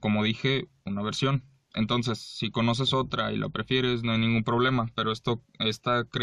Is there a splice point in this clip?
no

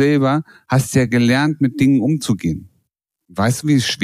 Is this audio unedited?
yes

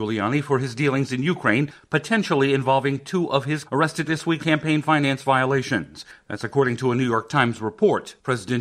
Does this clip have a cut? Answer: yes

